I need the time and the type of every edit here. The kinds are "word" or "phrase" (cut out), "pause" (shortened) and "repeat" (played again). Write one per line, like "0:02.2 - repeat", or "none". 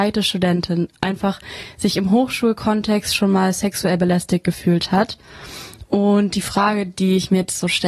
none